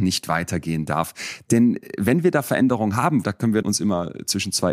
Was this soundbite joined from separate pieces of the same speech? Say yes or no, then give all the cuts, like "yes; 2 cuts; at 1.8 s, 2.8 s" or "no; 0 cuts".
yes; 2 cuts; at 3.2 s, 3.6 s